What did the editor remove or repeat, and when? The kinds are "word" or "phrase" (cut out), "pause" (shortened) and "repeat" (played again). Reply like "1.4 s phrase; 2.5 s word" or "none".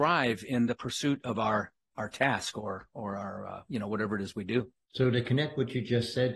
4.8 s pause